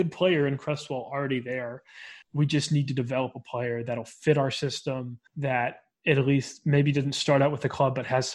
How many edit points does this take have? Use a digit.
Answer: 2